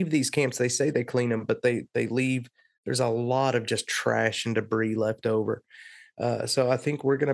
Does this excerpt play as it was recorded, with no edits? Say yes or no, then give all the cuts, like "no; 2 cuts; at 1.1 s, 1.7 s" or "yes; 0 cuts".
yes; 0 cuts